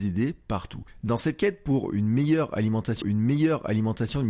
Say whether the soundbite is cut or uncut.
cut